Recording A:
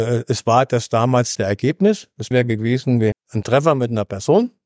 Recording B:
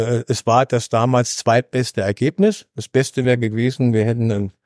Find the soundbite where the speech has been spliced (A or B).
A